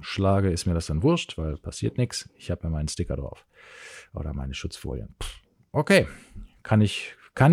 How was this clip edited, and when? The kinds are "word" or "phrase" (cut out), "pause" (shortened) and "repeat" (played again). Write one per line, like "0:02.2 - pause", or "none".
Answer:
none